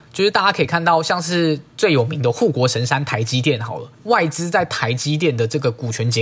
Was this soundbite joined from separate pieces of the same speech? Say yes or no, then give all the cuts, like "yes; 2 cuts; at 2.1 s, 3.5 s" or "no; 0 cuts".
yes; 1 cut; at 3.9 s